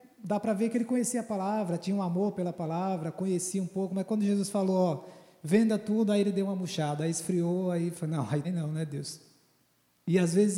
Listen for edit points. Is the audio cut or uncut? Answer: cut